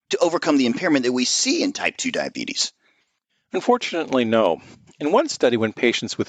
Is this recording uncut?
yes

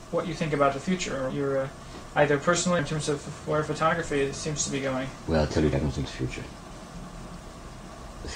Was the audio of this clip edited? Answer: yes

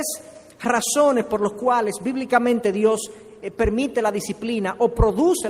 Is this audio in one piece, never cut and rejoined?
yes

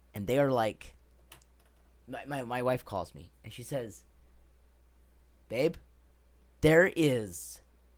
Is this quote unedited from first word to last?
yes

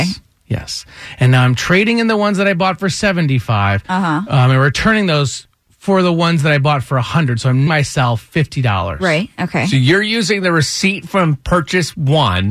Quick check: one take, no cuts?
no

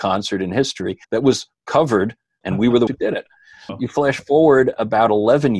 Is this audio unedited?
no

